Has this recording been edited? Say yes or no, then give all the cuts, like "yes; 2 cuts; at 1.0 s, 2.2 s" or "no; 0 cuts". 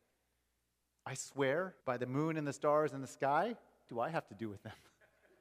yes; 2 cuts; at 1.8 s, 3.9 s